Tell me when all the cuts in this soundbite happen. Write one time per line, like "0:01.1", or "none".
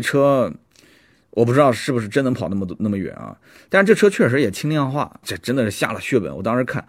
0:05.2